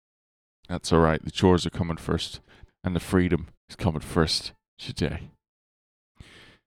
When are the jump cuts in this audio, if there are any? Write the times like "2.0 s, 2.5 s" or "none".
2.7 s, 3.6 s